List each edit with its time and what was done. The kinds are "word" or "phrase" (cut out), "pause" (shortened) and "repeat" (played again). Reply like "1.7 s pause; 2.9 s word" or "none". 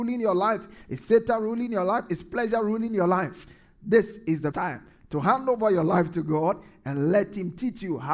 4.5 s word